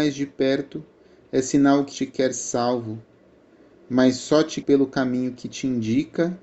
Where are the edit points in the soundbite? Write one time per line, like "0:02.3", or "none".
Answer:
0:01.9
0:04.6